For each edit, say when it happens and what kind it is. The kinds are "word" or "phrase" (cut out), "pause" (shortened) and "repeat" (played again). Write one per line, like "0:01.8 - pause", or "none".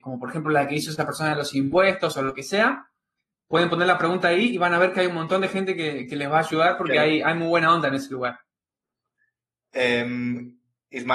none